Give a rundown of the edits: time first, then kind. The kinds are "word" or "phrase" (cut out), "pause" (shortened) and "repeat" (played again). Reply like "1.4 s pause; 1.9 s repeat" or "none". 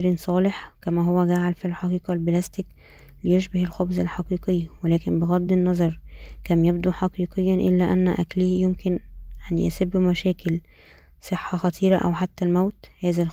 none